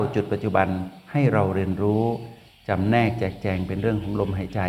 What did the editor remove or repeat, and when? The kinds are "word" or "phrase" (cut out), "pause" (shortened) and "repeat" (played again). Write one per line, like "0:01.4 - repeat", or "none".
none